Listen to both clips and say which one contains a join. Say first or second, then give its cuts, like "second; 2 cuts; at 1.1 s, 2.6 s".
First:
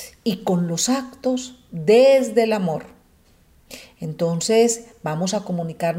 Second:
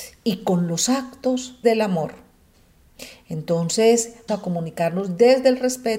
second; 2 cuts; at 1.6 s, 4.3 s